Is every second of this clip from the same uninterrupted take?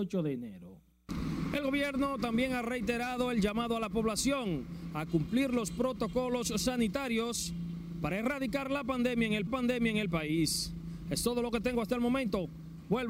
no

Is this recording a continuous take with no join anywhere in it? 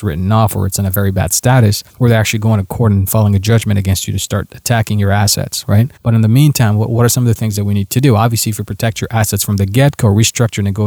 no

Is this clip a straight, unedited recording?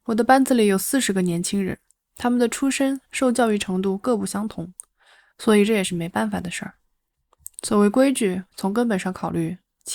yes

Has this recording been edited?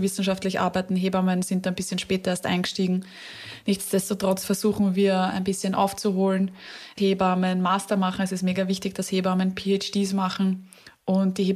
yes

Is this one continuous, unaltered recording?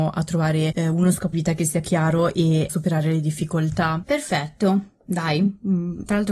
no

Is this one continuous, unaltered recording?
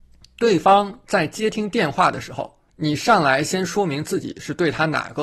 no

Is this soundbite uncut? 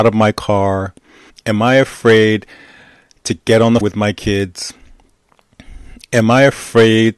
no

